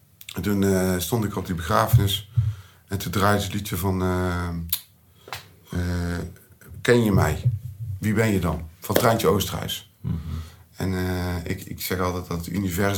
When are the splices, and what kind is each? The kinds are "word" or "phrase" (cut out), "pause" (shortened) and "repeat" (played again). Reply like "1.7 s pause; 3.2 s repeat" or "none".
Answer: none